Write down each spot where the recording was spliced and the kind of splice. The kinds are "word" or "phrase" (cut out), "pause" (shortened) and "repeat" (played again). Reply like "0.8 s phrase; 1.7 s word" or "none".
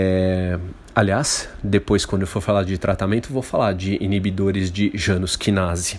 none